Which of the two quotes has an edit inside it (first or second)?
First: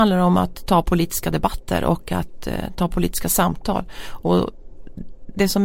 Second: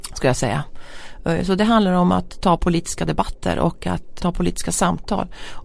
second